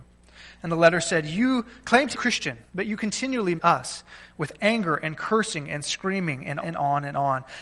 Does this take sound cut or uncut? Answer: cut